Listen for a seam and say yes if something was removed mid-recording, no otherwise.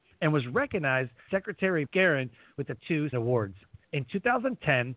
yes